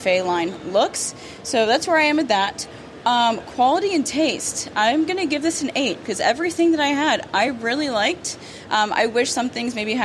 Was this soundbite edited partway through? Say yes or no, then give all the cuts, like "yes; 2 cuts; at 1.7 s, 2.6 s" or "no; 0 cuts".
no; 0 cuts